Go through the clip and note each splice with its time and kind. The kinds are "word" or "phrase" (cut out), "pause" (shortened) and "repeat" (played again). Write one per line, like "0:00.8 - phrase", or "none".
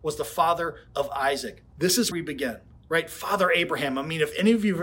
0:02.1 - word
0:02.8 - pause